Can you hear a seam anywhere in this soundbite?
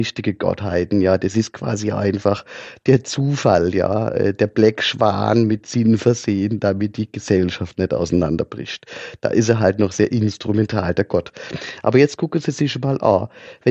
no; 0 cuts

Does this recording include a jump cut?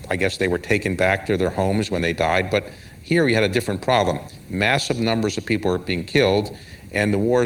no; 0 cuts

